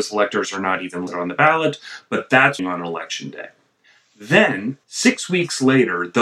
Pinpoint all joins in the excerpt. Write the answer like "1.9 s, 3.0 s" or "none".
1.1 s, 2.6 s, 4.8 s